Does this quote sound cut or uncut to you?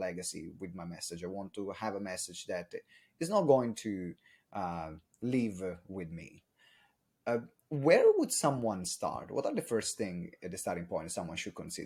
uncut